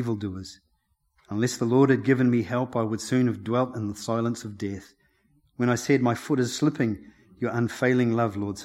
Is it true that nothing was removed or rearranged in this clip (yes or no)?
yes